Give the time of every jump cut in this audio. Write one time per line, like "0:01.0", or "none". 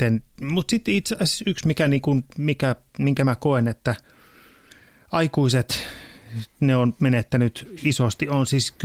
none